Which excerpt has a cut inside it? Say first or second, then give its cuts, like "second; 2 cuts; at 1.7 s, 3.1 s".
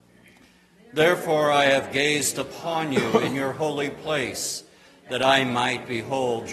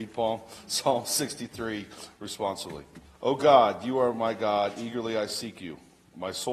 second; 1 cut; at 3.0 s